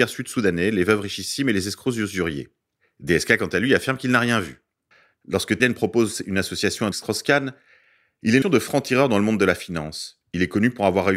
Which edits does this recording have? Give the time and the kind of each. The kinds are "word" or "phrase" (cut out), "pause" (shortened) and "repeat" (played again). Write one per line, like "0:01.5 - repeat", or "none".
0:05.6 - word
0:06.9 - word
0:08.4 - word